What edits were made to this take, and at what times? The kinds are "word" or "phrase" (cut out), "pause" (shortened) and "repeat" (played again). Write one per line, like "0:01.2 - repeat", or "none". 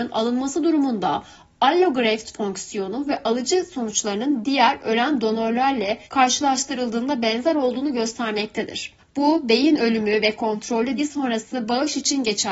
0:06.0 - pause
0:09.0 - pause
0:11.0 - word

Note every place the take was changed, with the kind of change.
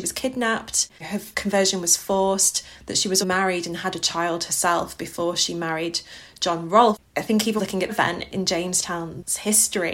0:01.0 - pause
0:03.2 - word
0:07.6 - phrase
0:07.9 - phrase

